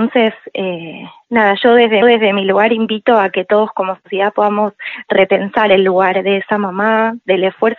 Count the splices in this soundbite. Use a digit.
1